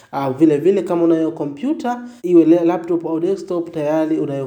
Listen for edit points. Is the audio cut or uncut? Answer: cut